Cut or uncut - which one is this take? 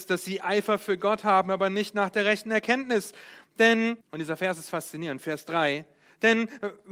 cut